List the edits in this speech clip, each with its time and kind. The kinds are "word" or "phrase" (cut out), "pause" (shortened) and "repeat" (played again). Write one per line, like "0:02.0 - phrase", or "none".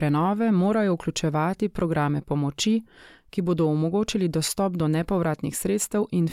none

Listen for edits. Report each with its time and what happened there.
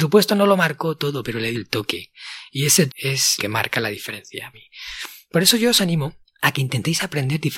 0:01.5 - word
0:02.9 - word
0:03.4 - word
0:04.5 - word
0:06.2 - pause

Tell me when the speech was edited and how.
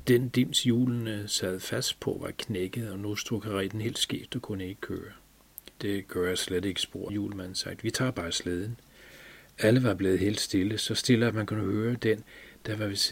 0:05.7 - pause
0:07.1 - word

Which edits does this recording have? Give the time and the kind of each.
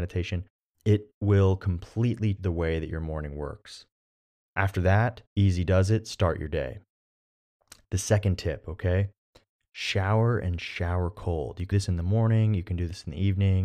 0:02.4 - word
0:05.3 - pause
0:11.7 - word

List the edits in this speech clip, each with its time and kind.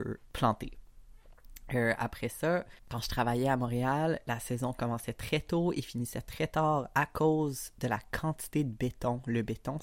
0:02.8 - pause

